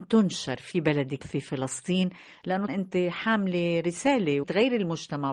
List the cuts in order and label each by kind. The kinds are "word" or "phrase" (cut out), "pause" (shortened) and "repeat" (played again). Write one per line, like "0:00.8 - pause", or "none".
0:01.2 - word
0:02.7 - word
0:04.4 - word

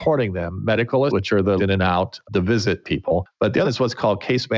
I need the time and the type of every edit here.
0:01.1 - word
0:01.6 - word
0:02.3 - word
0:02.8 - word
0:03.6 - word

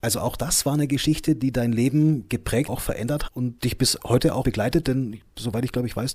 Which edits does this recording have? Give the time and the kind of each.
0:02.7 - word
0:03.3 - word
0:03.6 - word
0:04.4 - word

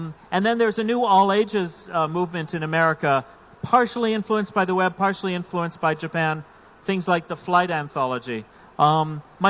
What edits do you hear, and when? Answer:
none

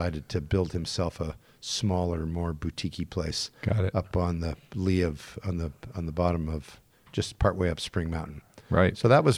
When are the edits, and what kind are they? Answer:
none

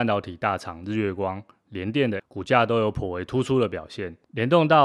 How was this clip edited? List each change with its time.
0:02.2 - word

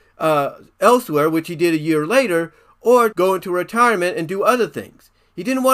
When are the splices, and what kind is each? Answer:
0:03.1 - word

